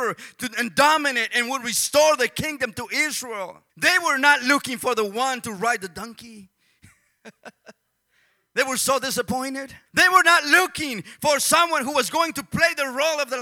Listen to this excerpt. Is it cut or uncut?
cut